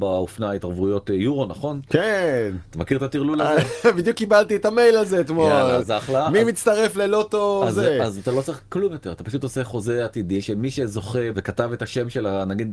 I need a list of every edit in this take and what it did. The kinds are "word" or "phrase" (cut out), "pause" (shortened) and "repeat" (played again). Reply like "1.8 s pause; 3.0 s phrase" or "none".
none

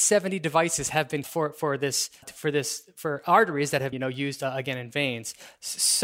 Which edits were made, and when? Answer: 1.2 s word; 2.2 s word; 3.9 s word

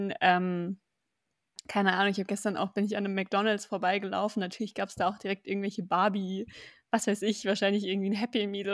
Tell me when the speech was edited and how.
none

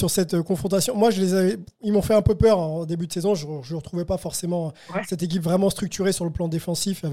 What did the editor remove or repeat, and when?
none

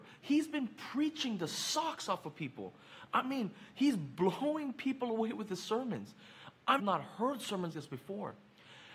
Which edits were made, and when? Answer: 6.8 s phrase; 7.7 s word

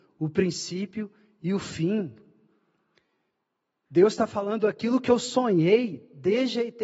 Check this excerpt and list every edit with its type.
none

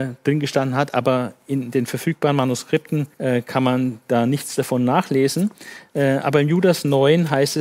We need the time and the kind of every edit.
3.1 s pause

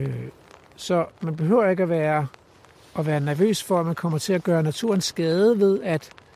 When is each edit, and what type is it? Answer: none

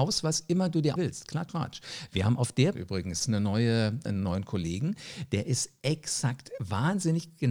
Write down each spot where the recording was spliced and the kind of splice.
1.0 s word; 1.5 s word; 2.7 s word; 3.2 s word; 4.1 s word

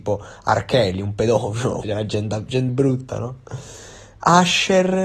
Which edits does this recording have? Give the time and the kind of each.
1.8 s word; 2.7 s word

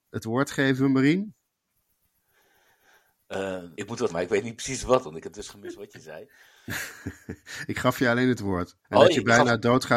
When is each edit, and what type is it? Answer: 3.7 s pause; 4.1 s word; 8.8 s pause

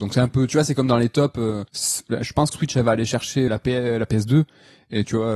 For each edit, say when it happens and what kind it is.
1.7 s pause; 2.5 s word; 3.5 s word

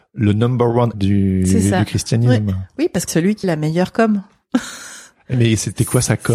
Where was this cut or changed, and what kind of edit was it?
0.9 s word; 3.1 s word; 3.4 s word; 5.3 s word

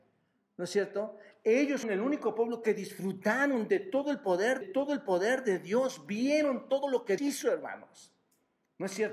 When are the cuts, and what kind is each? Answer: 1.8 s word; 4.6 s repeat; 7.2 s word

